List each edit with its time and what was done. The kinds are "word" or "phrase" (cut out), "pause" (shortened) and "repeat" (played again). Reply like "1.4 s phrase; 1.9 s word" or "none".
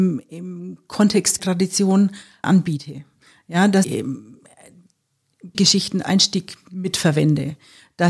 1.4 s word; 2.4 s word; 3.8 s word; 5.5 s word; 6.0 s word